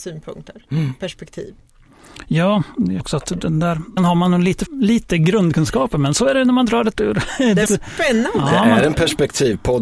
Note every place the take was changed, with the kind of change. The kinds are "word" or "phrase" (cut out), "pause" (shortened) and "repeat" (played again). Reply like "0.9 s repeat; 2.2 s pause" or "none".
3.0 s word; 4.0 s word; 4.7 s word; 6.9 s word; 7.7 s word